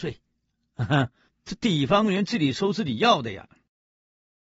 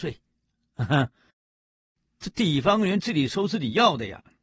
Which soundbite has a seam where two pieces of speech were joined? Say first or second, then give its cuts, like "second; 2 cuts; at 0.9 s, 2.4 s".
first; 1 cut; at 1.3 s